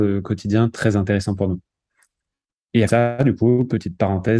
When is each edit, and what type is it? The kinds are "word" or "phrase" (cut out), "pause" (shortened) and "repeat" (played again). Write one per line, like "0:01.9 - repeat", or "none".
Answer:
0:02.9 - phrase